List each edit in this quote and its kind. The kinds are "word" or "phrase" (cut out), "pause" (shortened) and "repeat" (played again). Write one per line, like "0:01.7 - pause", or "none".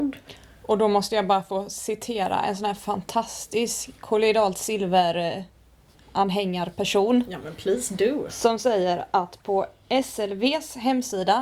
none